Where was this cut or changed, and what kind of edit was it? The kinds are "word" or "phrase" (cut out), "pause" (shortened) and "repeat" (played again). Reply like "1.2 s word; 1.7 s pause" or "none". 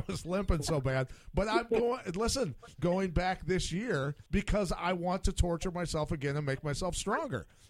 2.8 s word; 4.3 s pause